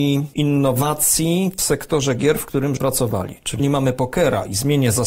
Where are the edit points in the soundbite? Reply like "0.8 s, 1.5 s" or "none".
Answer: 2.8 s, 3.6 s